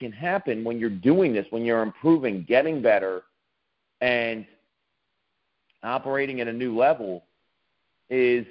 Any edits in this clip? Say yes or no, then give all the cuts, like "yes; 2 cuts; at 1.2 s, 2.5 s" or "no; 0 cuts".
no; 0 cuts